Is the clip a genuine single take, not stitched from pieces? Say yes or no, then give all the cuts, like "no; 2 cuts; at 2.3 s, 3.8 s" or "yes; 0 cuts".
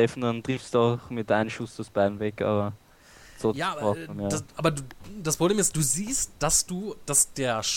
yes; 0 cuts